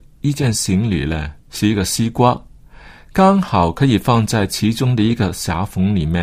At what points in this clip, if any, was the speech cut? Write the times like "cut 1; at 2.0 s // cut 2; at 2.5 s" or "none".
cut 1; at 1.4 s